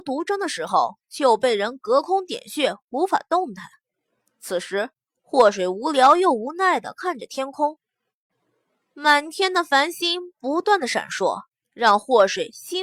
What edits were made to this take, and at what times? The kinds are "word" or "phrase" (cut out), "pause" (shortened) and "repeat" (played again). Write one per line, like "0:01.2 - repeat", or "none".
none